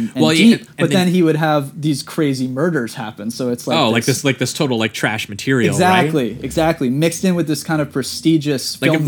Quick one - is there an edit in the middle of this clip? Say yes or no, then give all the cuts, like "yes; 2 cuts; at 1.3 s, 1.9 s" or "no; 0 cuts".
no; 0 cuts